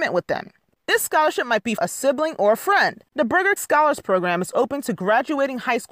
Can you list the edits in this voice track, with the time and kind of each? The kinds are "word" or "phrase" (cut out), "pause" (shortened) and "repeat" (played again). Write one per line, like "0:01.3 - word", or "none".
0:01.8 - phrase
0:03.1 - pause
0:03.6 - word